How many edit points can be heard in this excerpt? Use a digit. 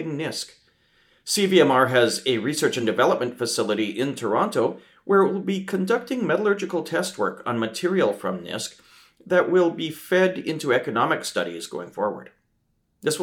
0